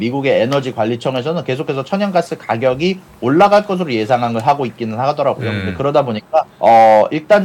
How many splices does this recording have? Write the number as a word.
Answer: one